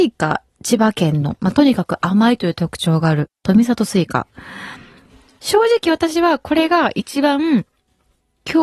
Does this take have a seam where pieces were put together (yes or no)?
no